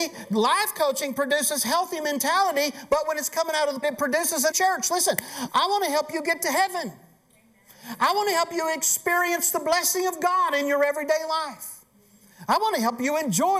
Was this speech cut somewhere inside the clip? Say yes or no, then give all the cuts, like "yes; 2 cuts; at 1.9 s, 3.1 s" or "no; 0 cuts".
yes; 2 cuts; at 3.8 s, 4.5 s